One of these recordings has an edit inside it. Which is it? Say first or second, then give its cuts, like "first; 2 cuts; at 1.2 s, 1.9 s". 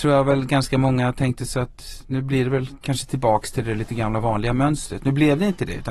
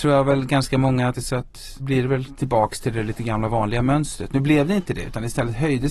second; 3 cuts; at 1.1 s, 1.8 s, 2.3 s